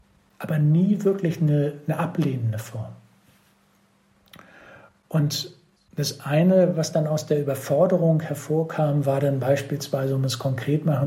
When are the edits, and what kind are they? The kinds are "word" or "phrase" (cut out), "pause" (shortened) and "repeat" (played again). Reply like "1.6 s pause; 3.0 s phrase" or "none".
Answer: none